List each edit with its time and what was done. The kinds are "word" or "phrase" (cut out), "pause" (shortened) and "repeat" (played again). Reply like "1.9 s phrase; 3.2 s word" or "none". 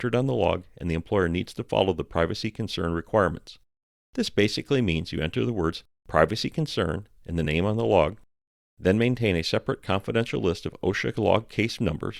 none